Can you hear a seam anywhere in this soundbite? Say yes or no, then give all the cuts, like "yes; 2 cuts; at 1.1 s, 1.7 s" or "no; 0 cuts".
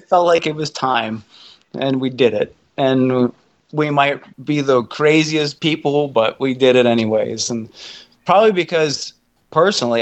no; 0 cuts